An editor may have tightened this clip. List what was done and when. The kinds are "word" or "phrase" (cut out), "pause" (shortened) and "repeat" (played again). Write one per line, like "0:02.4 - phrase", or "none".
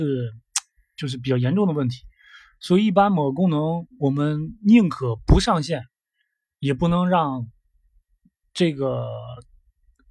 none